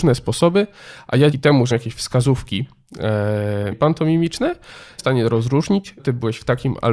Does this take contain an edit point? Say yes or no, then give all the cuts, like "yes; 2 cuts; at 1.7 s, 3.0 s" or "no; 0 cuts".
yes; 5 cuts; at 1.3 s, 1.7 s, 3.7 s, 5.0 s, 6.0 s